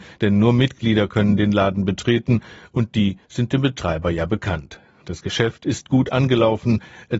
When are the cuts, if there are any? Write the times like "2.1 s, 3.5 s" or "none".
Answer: none